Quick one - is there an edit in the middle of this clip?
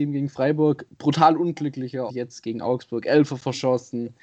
yes; 1 cut; at 2.1 s

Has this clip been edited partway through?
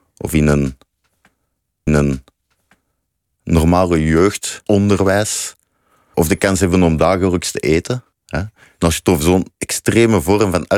yes; 5 cuts; at 1.9 s, 4.7 s, 6.1 s, 8.1 s, 9.5 s

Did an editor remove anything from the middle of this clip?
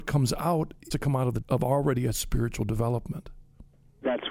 yes; 2 cuts; at 0.9 s, 1.4 s

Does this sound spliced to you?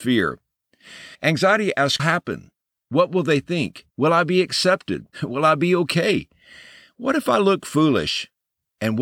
yes; 4 cuts; at 1.1 s, 2.0 s, 3.9 s, 5.1 s

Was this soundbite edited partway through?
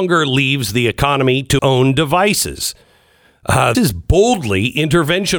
yes; 2 cuts; at 1.6 s, 3.7 s

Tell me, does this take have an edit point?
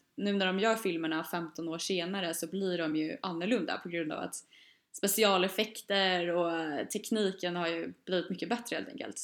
no; 0 cuts

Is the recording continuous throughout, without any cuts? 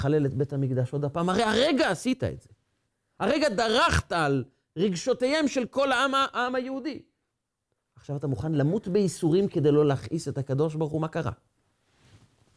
yes; 0 cuts

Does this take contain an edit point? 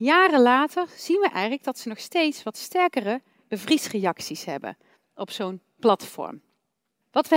no; 0 cuts

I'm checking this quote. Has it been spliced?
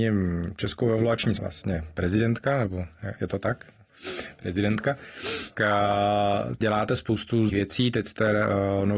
yes; 5 cuts; at 1.4 s, 3.2 s, 5.5 s, 6.6 s, 7.5 s

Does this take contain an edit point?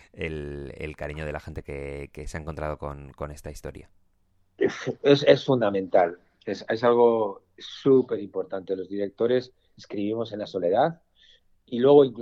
no; 0 cuts

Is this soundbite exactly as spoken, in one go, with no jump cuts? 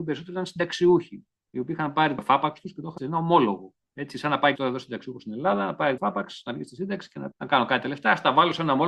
no; 5 cuts; at 2.2 s, 3.0 s, 4.6 s, 6.0 s, 7.3 s

